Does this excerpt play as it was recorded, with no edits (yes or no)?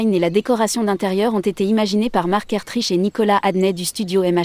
yes